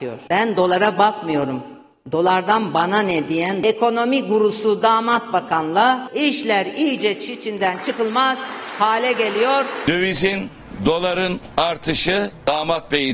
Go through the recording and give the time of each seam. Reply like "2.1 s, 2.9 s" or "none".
none